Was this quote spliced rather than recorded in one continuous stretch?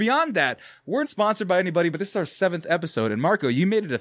yes; 1 cut; at 1.0 s

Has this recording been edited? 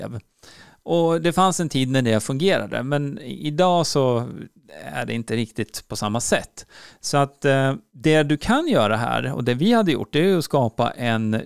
no; 0 cuts

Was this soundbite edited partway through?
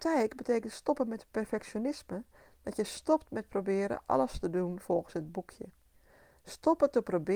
no; 0 cuts

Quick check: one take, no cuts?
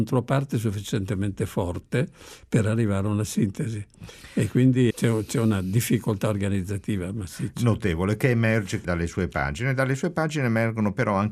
no; 2 cuts; at 4.9 s, 8.8 s

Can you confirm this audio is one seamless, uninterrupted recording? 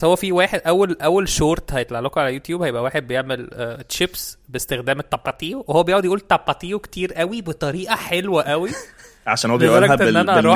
yes; 0 cuts

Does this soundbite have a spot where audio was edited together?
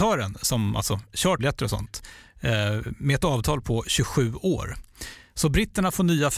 yes; 1 cut; at 1.4 s

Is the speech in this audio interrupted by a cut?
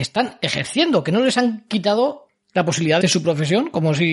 yes; 1 cut; at 3.0 s

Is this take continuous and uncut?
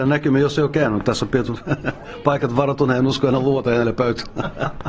yes; 0 cuts

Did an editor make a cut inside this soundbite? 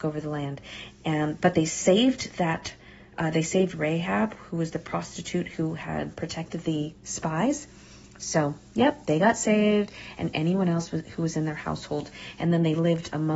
no; 0 cuts

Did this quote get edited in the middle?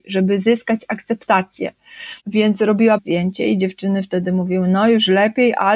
yes; 2 cuts; at 2.2 s, 3.0 s

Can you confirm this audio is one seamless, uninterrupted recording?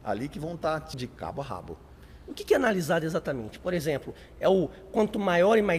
no; 1 cut; at 0.9 s

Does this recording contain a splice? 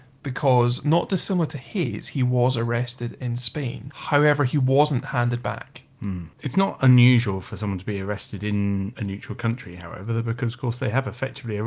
no; 0 cuts

